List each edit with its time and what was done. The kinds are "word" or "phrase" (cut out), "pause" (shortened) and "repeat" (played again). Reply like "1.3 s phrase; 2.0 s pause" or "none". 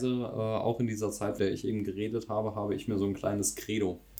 1.4 s word